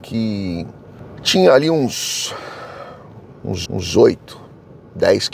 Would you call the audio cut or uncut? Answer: cut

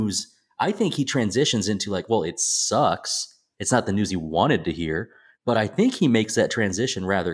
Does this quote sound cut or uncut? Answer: uncut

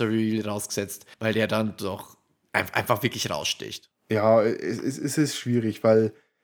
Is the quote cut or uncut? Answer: cut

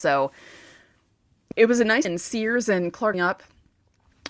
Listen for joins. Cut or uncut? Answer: cut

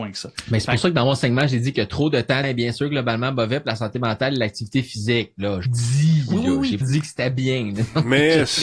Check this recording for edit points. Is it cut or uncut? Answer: cut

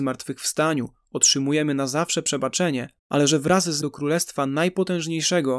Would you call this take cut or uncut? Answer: cut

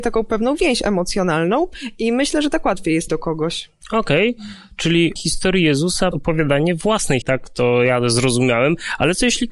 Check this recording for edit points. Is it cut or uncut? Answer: cut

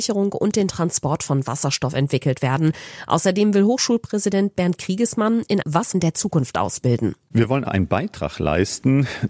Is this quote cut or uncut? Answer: cut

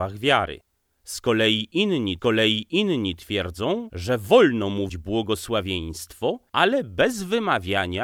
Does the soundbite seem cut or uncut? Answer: cut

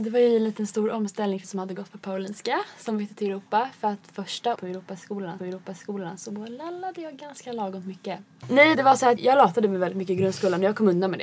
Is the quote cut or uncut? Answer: cut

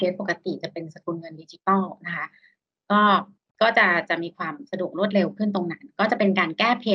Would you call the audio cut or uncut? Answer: cut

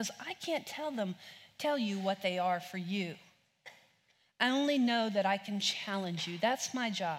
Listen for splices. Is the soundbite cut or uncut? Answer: uncut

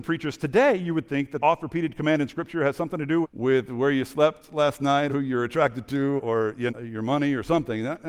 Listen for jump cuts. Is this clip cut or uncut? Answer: cut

